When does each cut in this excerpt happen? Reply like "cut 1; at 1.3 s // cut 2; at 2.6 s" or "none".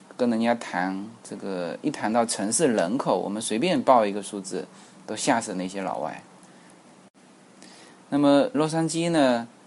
cut 1; at 8.5 s